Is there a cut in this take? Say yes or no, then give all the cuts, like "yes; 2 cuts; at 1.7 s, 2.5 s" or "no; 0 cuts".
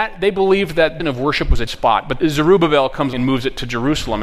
yes; 4 cuts; at 1.0 s, 1.7 s, 2.2 s, 3.1 s